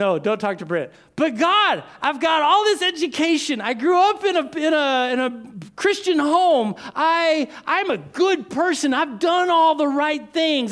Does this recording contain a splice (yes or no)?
no